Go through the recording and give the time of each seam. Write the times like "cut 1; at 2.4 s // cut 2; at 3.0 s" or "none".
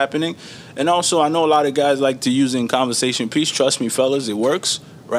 none